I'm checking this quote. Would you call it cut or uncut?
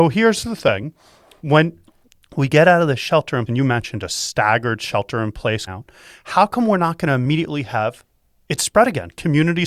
cut